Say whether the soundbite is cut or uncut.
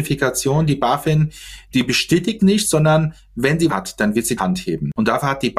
cut